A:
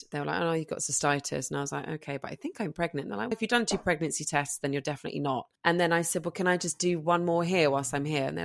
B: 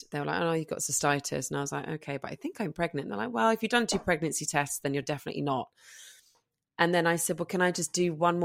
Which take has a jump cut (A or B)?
A